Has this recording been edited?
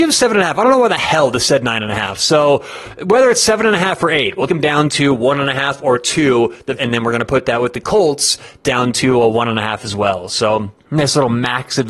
yes; 3 cuts; at 4.5 s, 6.8 s, 10.8 s

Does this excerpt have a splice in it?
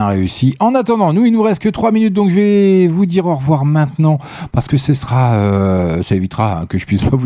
no; 0 cuts

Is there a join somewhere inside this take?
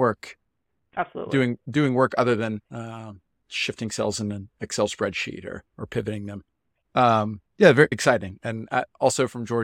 yes; 4 cuts; at 2.6 s, 5.7 s, 7.5 s, 7.9 s

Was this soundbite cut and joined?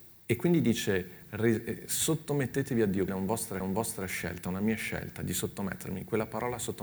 yes; 2 cuts; at 3.1 s, 3.6 s

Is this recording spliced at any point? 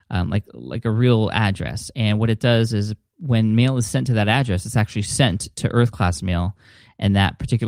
no; 0 cuts

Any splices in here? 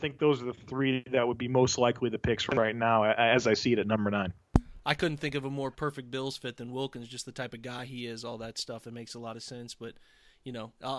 no; 0 cuts

